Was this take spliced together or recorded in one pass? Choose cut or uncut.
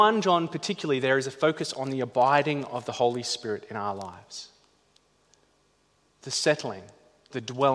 uncut